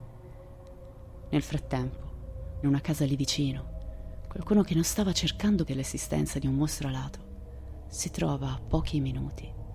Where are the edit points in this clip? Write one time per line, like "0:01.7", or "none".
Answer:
0:02.6
0:05.7

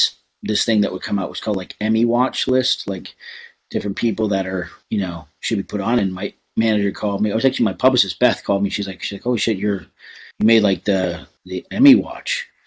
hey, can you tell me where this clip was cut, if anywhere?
0:04.8
0:10.3
0:11.4

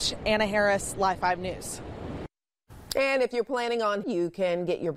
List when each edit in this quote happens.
0:04.0

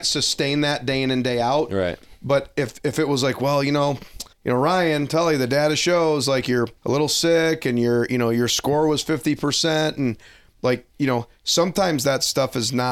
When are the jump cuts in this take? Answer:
0:04.3
0:06.8
0:10.9

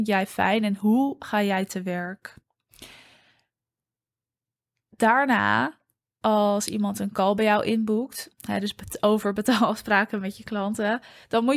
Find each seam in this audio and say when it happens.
none

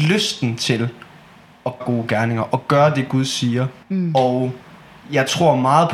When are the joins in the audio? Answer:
0:01.8
0:03.8

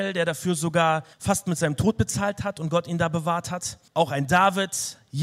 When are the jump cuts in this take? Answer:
0:01.1
0:03.9

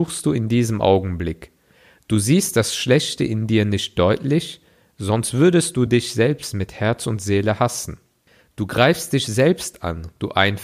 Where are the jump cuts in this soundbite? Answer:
none

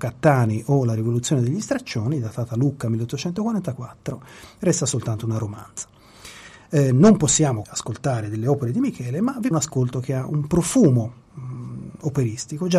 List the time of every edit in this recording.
0:07.6
0:09.5

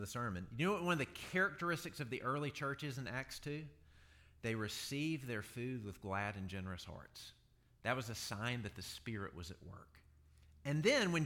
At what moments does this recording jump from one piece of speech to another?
none

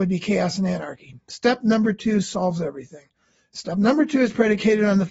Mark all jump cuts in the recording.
none

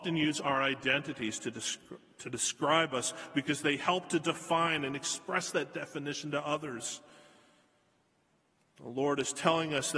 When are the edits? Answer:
none

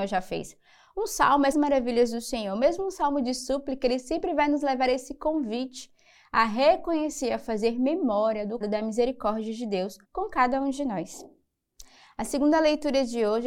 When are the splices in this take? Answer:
0:01.5
0:08.6
0:10.0

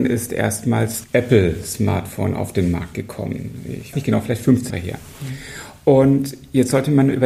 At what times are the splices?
0:01.0
0:03.9
0:04.7

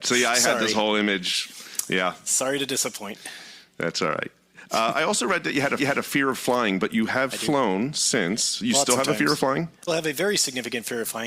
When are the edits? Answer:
0:05.8
0:09.9

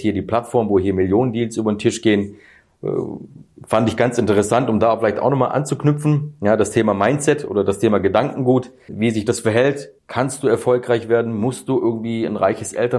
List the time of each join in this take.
0:08.9
0:10.0

